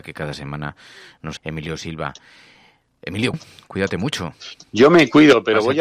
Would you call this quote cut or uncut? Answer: cut